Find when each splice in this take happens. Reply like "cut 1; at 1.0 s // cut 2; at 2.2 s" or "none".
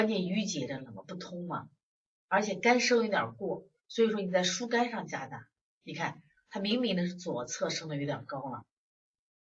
none